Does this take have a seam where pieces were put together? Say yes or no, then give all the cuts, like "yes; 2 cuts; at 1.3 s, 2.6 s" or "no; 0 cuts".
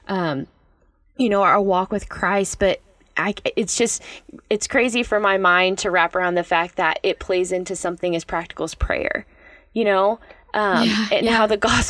no; 0 cuts